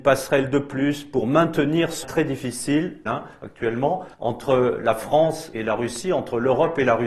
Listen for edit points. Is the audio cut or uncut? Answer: cut